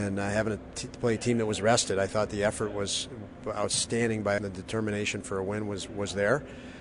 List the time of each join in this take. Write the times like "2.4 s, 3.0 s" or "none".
4.4 s